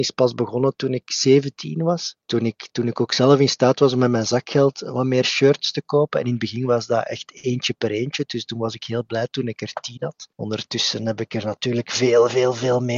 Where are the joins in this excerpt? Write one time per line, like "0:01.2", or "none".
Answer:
0:02.2
0:10.3

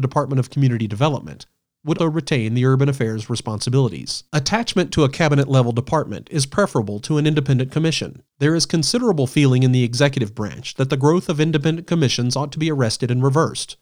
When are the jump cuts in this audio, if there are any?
0:02.0
0:04.3
0:08.3

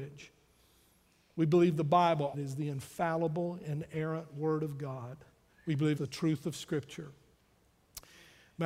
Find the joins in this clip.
0:02.3
0:05.5
0:06.0

